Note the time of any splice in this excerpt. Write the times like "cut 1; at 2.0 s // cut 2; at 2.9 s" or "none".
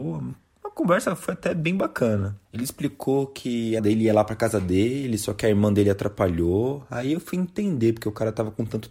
cut 1; at 2.4 s // cut 2; at 3.8 s